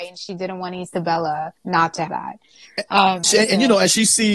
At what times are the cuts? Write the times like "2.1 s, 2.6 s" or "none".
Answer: 1.6 s, 2.1 s, 3.2 s